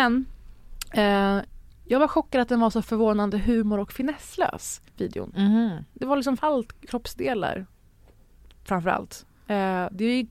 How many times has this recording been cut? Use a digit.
3